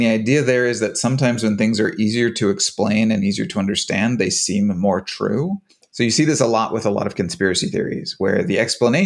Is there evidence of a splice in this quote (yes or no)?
yes